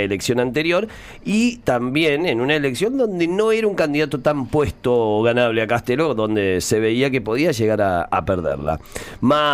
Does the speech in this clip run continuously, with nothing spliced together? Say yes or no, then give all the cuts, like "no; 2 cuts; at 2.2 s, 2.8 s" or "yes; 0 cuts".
yes; 0 cuts